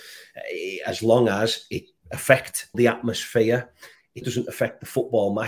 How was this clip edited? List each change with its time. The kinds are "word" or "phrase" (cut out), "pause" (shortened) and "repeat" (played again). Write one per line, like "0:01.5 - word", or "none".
0:02.0 - word
0:02.7 - phrase
0:04.2 - word